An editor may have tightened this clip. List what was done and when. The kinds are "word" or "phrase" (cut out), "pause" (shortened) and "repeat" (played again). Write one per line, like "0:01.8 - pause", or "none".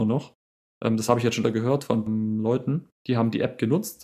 0:01.4 - word
0:02.1 - word
0:03.0 - pause